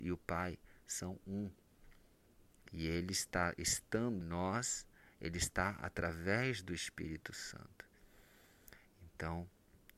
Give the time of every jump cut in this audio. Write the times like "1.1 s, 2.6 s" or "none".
4.2 s